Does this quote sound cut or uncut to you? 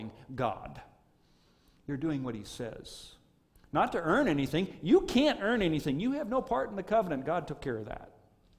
uncut